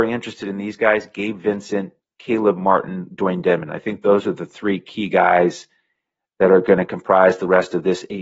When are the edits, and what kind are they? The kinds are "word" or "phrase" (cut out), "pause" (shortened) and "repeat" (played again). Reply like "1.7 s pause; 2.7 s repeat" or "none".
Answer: none